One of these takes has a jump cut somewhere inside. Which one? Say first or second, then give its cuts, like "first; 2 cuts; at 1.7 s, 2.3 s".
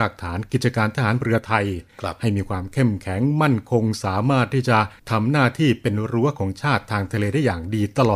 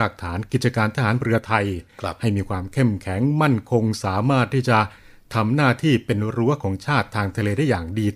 first; 1 cut; at 5.0 s